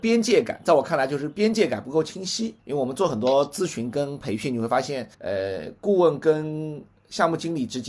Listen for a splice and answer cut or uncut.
cut